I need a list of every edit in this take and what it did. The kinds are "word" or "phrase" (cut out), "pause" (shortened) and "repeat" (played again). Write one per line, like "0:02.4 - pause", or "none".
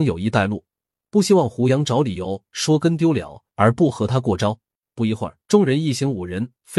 0:04.8 - pause
0:05.4 - pause